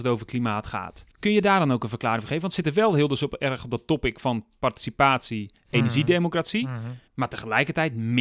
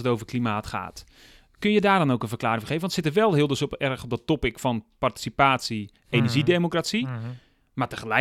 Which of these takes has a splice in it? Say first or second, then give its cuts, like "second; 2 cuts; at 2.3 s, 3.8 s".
first; 2 cuts; at 1.1 s, 7.1 s